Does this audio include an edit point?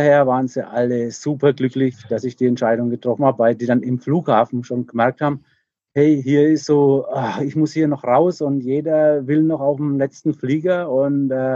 no; 0 cuts

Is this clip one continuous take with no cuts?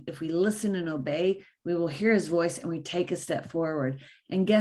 yes; 0 cuts

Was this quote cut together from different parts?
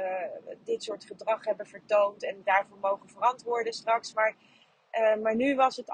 yes; 1 cut; at 2.4 s

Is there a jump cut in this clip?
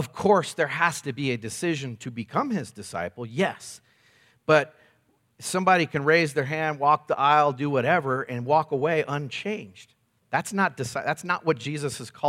no; 0 cuts

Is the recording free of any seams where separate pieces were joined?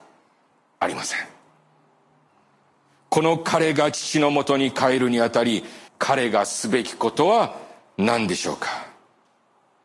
no; 2 cuts; at 2.3 s, 5.9 s

